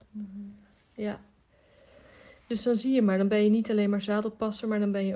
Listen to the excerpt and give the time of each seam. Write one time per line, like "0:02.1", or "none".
none